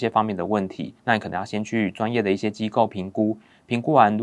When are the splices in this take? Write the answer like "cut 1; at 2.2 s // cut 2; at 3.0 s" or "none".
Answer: cut 1; at 1.0 s